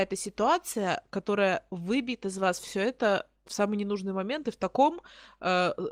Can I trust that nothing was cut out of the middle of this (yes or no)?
yes